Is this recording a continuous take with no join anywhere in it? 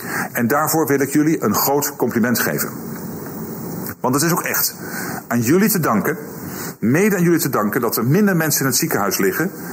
yes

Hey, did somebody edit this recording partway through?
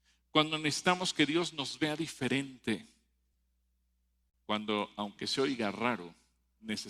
no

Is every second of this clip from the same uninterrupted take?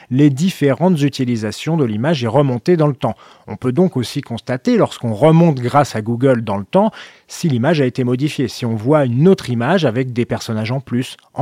yes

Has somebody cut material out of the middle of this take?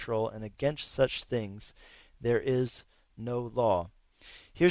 no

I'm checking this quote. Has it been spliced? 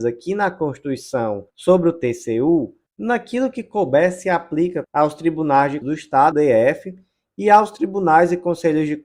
yes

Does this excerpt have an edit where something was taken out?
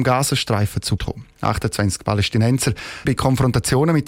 yes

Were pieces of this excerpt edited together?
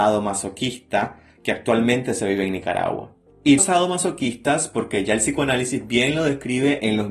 yes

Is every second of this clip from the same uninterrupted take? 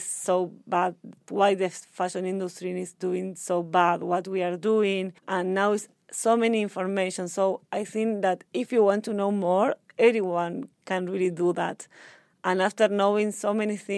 no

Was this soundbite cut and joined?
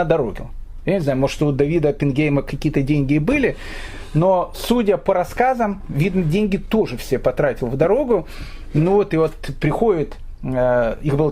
no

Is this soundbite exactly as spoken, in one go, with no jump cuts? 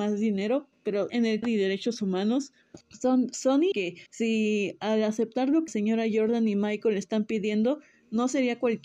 no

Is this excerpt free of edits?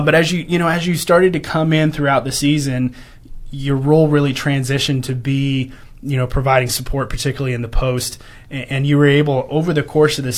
yes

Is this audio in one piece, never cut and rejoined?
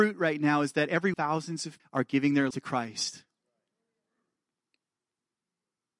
no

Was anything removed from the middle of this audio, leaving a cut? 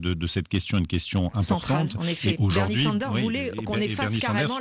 no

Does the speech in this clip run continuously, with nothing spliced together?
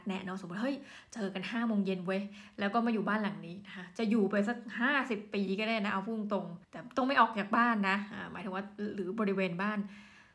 no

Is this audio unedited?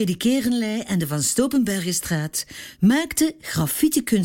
yes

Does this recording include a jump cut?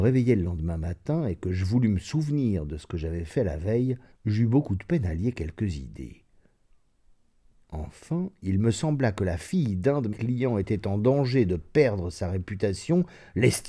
yes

